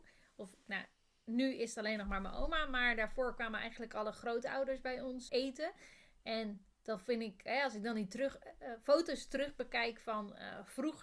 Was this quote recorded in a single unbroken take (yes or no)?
no